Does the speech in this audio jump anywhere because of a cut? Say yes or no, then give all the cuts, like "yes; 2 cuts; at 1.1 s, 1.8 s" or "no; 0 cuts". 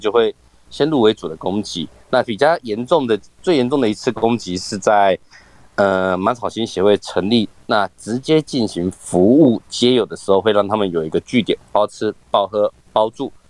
no; 0 cuts